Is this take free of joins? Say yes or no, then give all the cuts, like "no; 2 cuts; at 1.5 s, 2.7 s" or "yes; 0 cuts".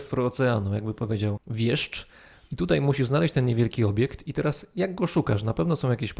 yes; 0 cuts